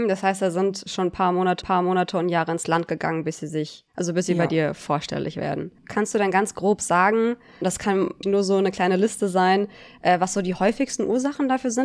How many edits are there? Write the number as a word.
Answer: three